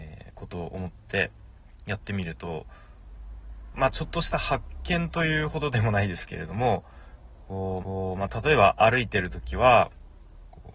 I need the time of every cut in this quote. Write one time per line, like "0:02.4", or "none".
0:03.7
0:07.8